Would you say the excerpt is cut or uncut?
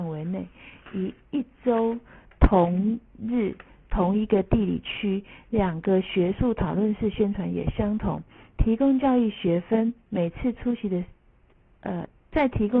uncut